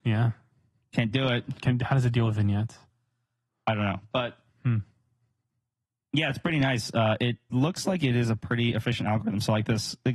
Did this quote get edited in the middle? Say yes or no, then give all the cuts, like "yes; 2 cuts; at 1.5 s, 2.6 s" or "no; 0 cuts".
no; 0 cuts